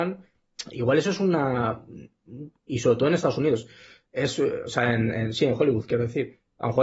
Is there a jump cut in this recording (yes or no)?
no